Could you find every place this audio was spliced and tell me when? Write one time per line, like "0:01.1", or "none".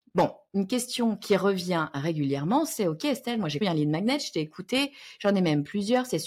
0:03.6